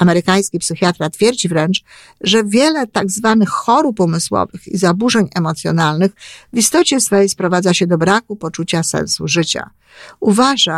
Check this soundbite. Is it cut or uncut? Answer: uncut